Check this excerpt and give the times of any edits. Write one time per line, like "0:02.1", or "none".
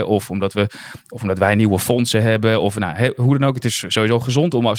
none